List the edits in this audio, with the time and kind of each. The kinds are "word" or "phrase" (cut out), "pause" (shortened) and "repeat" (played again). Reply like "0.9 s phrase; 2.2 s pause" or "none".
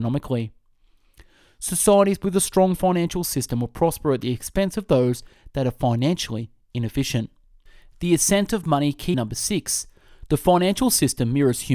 9.1 s word